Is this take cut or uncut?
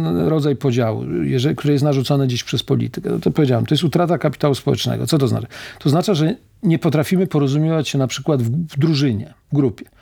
uncut